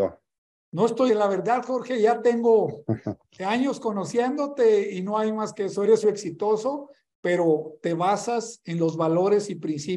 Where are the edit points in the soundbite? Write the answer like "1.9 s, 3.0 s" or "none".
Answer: 1.1 s, 6.0 s